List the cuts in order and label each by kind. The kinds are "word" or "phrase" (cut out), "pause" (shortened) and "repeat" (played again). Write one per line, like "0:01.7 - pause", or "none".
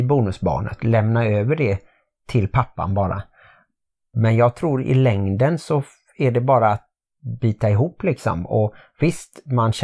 none